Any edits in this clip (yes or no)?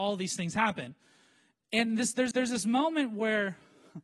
yes